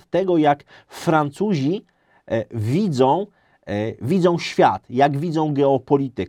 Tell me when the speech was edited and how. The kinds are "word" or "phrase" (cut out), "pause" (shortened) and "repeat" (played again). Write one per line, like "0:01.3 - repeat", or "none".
none